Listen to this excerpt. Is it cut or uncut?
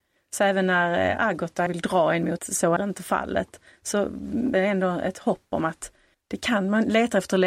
cut